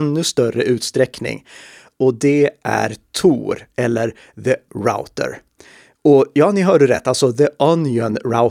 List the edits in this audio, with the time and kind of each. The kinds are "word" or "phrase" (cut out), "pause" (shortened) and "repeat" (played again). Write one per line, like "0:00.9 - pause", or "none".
0:04.7 - word

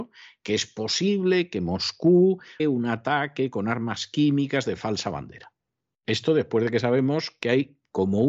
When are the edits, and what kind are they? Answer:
0:02.6 - word

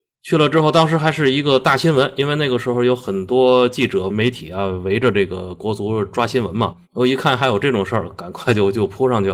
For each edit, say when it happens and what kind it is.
0:06.8 - pause

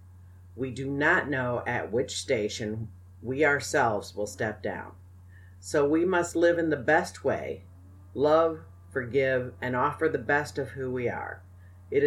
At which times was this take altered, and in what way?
none

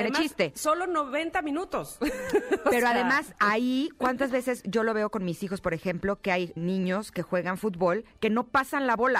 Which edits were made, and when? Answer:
0:06.6 - word

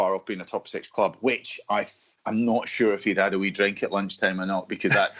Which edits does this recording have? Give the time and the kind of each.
0:02.2 - pause

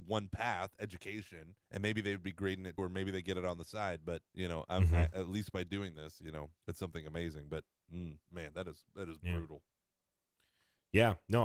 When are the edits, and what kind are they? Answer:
0:01.6 - pause
0:02.8 - word
0:04.3 - pause
0:06.6 - pause
0:08.2 - pause

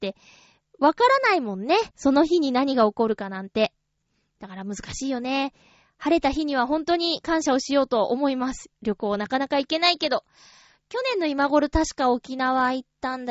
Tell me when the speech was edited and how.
0:01.9 - pause

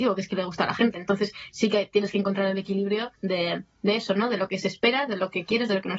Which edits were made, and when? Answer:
0:03.1 - pause

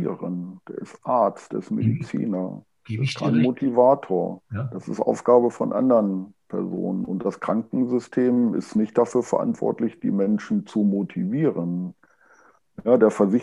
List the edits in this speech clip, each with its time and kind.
0:04.4 - pause

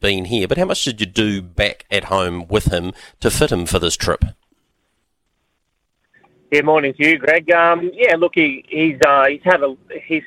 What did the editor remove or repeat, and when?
none

